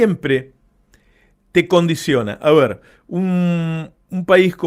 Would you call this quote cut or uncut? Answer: uncut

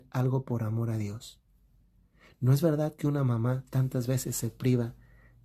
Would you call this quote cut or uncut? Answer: uncut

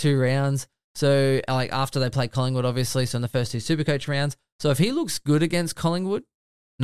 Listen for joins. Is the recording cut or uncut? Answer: uncut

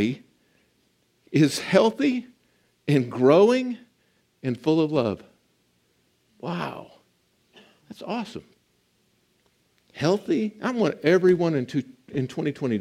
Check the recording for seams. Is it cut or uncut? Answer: uncut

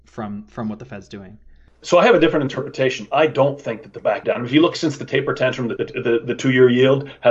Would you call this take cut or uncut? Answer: cut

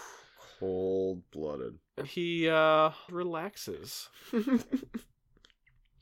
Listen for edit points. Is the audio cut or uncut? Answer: cut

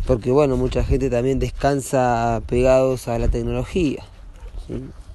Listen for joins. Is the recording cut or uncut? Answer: uncut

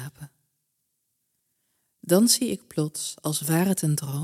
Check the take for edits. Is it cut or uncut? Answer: uncut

